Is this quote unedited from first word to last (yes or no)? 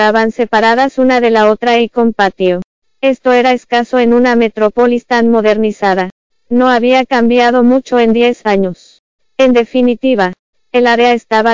yes